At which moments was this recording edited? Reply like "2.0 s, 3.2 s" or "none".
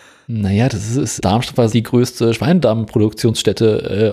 1.2 s, 1.7 s